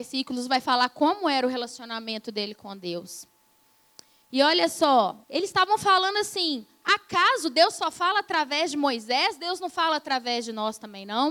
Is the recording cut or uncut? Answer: cut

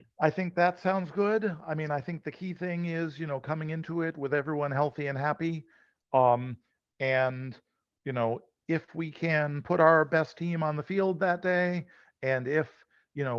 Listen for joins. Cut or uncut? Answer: uncut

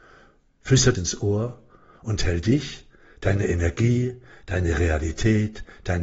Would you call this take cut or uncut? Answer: cut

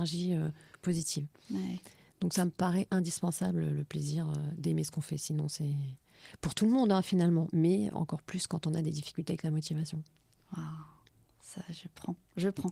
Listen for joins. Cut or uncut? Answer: uncut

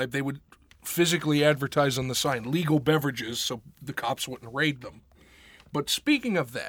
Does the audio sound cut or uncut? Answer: uncut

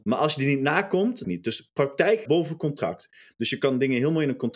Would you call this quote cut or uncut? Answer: cut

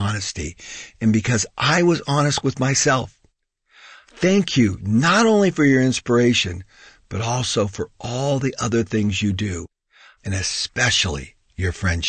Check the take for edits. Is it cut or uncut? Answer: uncut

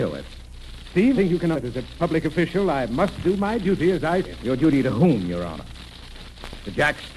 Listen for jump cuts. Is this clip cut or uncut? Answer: cut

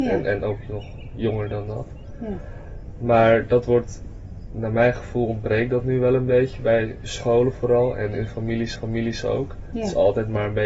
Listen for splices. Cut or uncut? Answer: cut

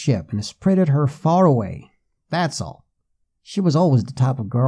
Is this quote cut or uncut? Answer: uncut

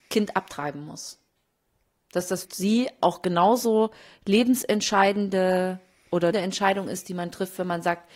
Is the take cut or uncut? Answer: cut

